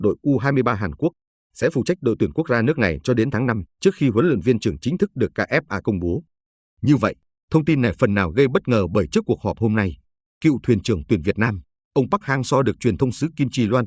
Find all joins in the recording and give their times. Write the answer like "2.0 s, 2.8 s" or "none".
3.7 s